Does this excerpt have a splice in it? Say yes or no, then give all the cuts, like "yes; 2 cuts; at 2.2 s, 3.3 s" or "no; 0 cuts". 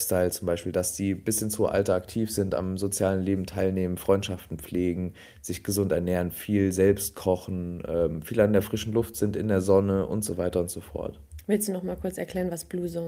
no; 0 cuts